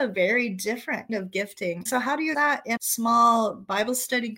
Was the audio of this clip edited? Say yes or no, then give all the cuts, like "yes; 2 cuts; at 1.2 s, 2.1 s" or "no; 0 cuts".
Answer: yes; 4 cuts; at 1.1 s, 1.9 s, 2.3 s, 2.8 s